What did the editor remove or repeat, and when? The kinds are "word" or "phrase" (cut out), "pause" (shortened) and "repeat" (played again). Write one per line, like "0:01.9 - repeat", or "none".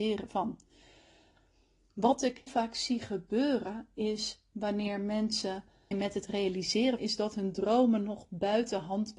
0:02.5 - word
0:05.9 - phrase
0:07.0 - phrase